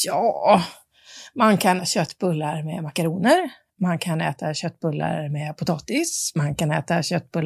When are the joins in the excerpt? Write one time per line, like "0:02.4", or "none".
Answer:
0:01.8